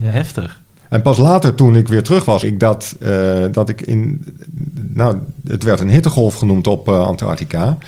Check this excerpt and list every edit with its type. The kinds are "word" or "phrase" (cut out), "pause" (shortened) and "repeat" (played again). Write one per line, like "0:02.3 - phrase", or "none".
0:02.4 - word